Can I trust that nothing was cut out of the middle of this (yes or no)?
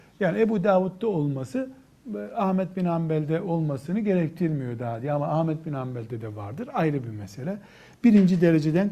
yes